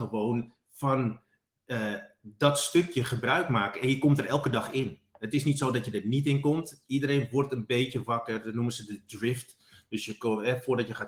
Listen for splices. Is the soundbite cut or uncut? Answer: uncut